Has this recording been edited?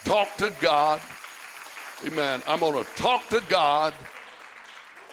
no; 0 cuts

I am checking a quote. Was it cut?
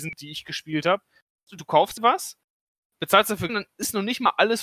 yes; 2 cuts; at 2.0 s, 3.5 s

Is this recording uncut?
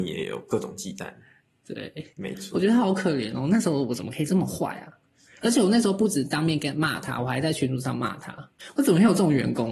yes; 0 cuts

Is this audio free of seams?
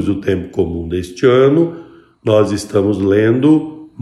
yes; 0 cuts

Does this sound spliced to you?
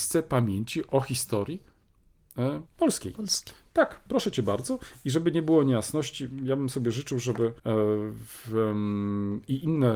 yes; 2 cuts; at 2.7 s, 7.6 s

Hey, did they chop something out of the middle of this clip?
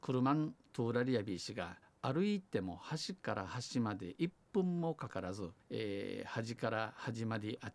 yes; 2 cuts; at 1.8 s, 5.6 s

